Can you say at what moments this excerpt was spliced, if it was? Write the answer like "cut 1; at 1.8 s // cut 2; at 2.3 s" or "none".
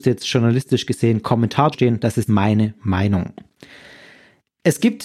cut 1; at 1.7 s // cut 2; at 2.3 s // cut 3; at 2.8 s